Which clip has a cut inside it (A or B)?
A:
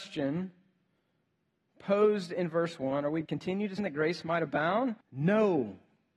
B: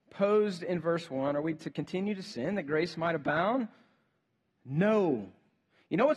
A